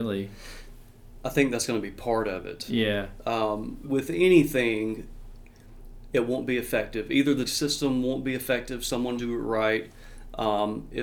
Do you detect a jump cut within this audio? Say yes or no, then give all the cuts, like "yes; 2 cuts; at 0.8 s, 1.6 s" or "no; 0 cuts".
yes; 3 cuts; at 3.8 s, 7.4 s, 9.2 s